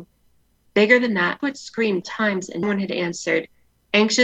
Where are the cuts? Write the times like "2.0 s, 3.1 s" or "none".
1.4 s, 2.0 s, 2.6 s